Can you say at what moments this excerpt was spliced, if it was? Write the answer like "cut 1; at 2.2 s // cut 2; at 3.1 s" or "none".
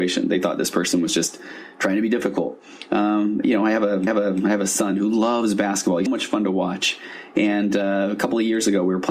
cut 1; at 4.1 s // cut 2; at 6.1 s